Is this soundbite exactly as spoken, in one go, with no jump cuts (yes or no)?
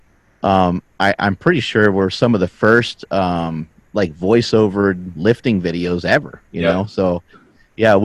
no